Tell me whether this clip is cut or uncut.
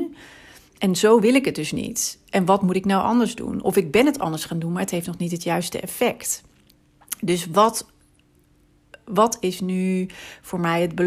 uncut